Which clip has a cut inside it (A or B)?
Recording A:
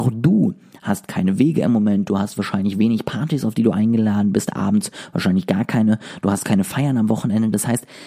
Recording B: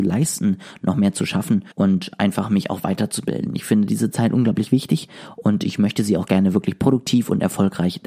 B